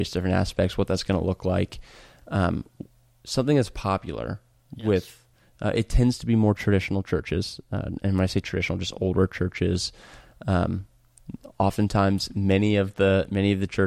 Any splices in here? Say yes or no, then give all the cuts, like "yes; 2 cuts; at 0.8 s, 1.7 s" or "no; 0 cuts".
no; 0 cuts